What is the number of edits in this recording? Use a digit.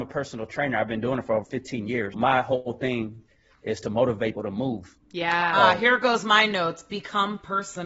3